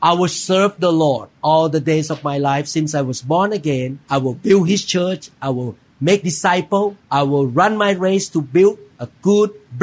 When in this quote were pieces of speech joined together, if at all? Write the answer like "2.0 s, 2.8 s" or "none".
4.0 s, 7.0 s